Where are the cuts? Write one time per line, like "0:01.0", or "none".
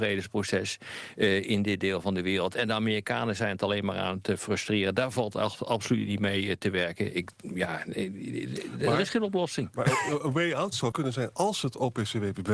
0:10.9